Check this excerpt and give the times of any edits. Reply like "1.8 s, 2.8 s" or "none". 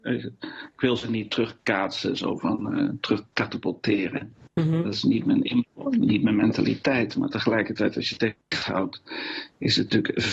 8.4 s